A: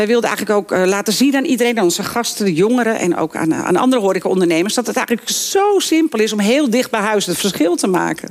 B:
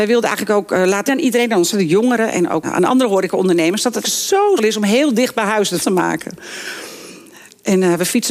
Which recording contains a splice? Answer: B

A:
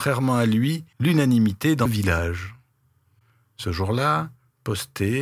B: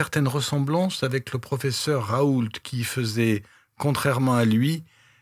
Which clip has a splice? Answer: A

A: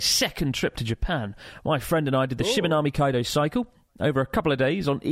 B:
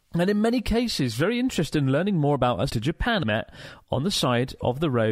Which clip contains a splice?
B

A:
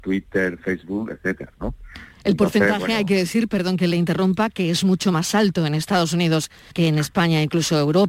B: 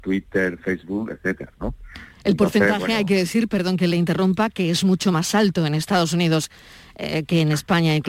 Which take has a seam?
A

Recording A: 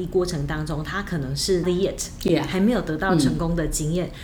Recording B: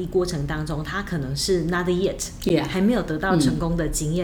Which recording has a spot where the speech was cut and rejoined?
A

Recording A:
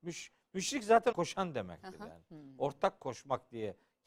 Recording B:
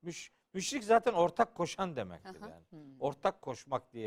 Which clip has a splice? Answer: A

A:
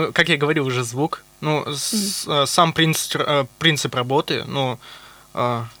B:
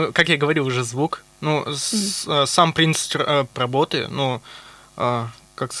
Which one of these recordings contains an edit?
B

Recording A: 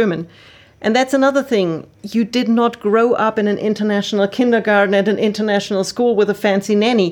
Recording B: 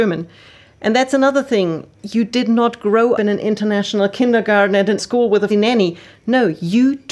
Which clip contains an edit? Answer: B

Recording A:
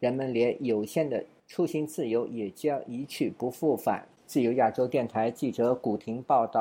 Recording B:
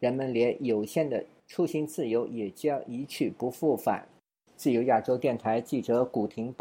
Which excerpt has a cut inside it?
A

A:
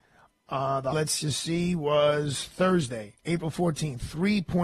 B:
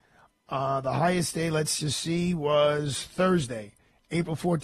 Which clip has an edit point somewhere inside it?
A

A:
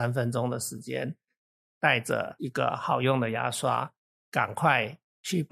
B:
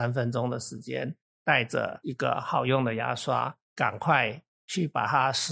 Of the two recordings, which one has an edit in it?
B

